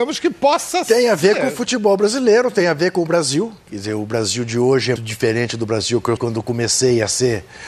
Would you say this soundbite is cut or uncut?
cut